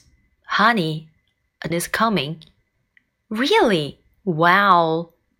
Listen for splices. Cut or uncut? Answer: cut